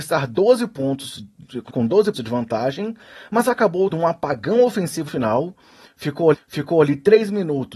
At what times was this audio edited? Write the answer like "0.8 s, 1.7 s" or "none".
1.7 s, 2.1 s, 3.9 s, 5.1 s, 6.3 s